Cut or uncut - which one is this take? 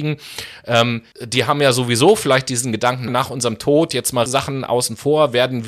cut